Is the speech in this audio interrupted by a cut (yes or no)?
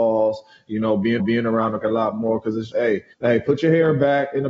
yes